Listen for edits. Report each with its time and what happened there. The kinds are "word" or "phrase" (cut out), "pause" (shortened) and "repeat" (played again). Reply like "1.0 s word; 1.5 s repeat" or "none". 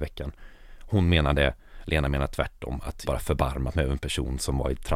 3.1 s phrase